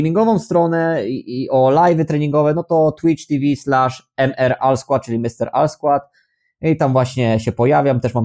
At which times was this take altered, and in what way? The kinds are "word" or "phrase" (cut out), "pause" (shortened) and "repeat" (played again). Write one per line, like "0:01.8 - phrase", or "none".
none